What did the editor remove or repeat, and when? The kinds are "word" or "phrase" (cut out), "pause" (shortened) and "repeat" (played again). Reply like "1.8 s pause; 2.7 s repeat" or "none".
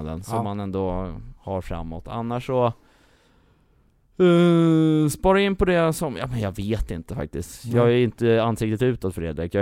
1.4 s pause